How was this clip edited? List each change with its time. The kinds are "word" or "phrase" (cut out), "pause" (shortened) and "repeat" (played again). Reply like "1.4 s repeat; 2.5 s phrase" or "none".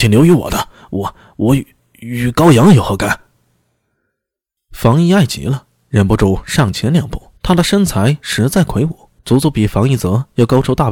7.4 s pause; 9.2 s pause